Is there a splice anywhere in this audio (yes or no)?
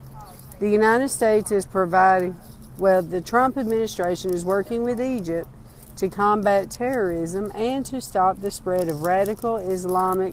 no